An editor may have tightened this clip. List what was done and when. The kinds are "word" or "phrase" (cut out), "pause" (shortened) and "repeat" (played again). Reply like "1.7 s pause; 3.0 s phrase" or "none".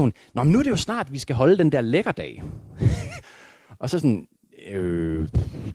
none